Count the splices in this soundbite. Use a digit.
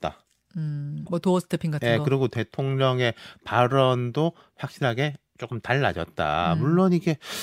1